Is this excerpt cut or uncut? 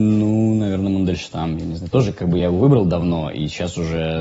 uncut